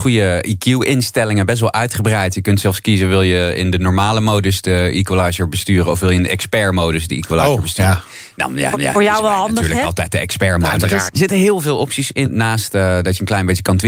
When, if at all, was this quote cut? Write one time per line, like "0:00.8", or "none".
0:08.7
0:11.1
0:12.2